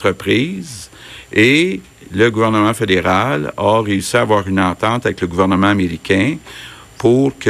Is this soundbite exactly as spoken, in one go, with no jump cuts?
yes; 0 cuts

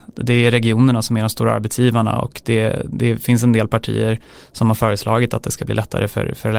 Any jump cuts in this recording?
no; 0 cuts

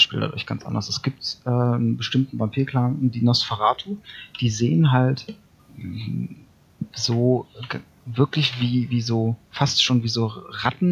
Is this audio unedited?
no; 2 cuts; at 5.6 s, 9.4 s

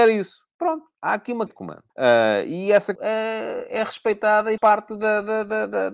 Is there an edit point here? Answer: yes; 5 cuts; at 0.9 s, 1.5 s, 1.9 s, 3.0 s, 4.6 s

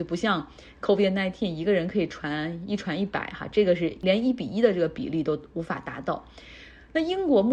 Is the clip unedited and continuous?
yes; 0 cuts

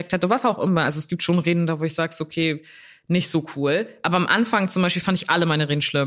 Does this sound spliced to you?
no; 0 cuts

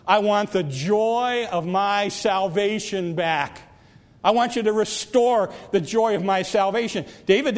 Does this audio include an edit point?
no; 0 cuts

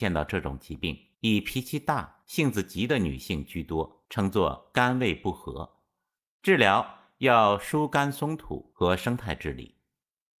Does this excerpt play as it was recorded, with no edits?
yes; 0 cuts

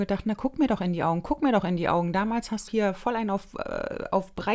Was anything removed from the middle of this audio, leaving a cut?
yes; 1 cut; at 2.7 s

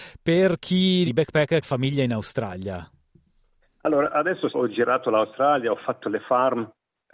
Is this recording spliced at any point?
yes; 3 cuts; at 1.1 s, 1.6 s, 4.5 s

